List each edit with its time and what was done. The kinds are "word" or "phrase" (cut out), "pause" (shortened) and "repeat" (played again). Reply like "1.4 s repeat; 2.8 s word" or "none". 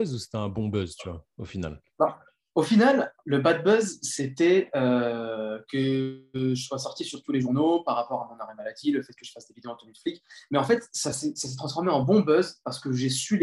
none